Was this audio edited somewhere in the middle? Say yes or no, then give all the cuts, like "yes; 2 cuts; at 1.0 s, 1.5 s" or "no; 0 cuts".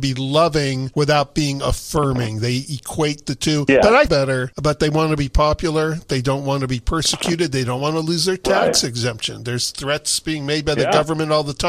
yes; 1 cut; at 4.1 s